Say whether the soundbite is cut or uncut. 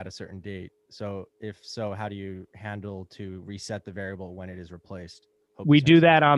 uncut